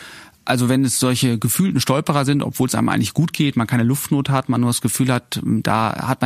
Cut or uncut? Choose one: uncut